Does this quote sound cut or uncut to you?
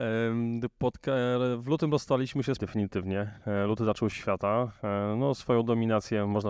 cut